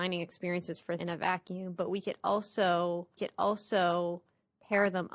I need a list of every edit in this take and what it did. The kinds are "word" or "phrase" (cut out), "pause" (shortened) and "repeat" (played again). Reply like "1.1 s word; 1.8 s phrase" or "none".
1.0 s word; 3.2 s repeat